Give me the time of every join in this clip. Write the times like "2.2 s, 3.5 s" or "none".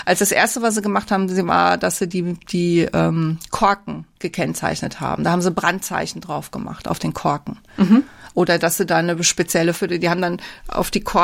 4.1 s, 7.7 s, 9.7 s